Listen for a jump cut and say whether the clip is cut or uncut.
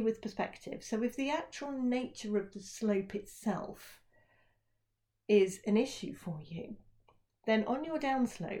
uncut